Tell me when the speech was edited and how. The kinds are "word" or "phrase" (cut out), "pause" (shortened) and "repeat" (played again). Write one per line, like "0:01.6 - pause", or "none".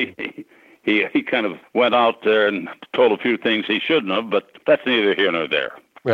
0:01.6 - pause
0:04.6 - pause